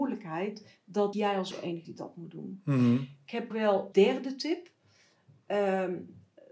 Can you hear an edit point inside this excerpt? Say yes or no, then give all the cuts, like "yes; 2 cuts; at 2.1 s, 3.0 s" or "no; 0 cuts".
yes; 5 cuts; at 1.1 s, 1.5 s, 1.8 s, 3.5 s, 3.9 s